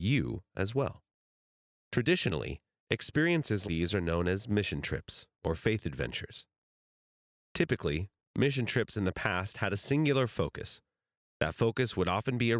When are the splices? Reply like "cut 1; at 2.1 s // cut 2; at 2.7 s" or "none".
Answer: cut 1; at 1.5 s // cut 2; at 3.6 s

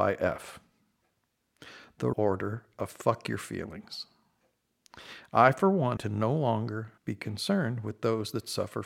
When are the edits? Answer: cut 1; at 2.1 s // cut 2; at 6.0 s // cut 3; at 7.0 s

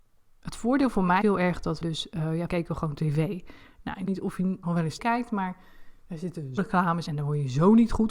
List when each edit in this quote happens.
cut 1; at 1.2 s // cut 2; at 1.8 s // cut 3; at 2.5 s // cut 4; at 4.1 s // cut 5; at 4.6 s // cut 6; at 5.0 s // cut 7; at 6.6 s // cut 8; at 7.1 s

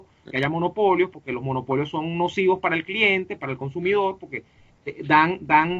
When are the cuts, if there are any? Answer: none

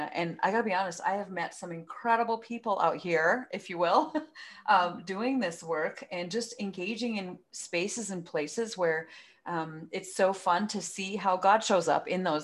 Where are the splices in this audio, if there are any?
none

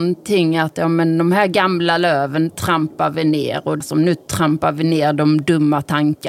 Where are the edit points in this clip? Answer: cut 1; at 2.5 s // cut 2; at 3.8 s

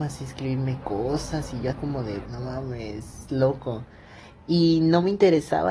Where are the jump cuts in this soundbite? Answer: cut 1; at 1.7 s // cut 2; at 2.2 s // cut 3; at 3.3 s

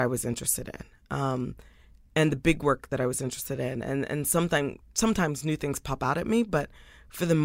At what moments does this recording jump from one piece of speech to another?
none

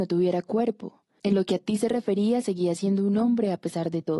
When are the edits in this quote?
none

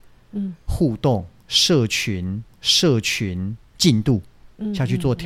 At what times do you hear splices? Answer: cut 1; at 2.5 s

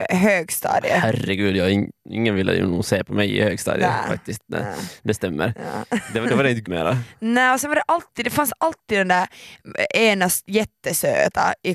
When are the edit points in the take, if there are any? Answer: cut 1; at 6.6 s

